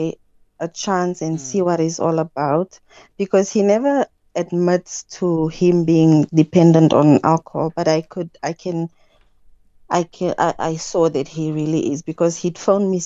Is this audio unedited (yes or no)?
yes